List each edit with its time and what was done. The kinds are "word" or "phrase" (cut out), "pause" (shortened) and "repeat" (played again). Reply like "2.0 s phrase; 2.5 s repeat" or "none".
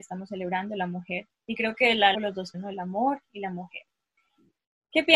1.3 s pause; 2.1 s phrase; 2.5 s word